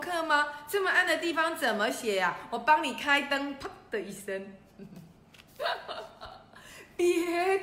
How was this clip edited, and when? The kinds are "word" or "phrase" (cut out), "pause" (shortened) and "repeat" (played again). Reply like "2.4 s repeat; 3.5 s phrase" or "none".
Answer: 5.5 s pause